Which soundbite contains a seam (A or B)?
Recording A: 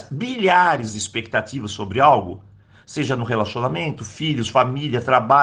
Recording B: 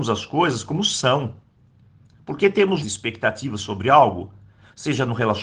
B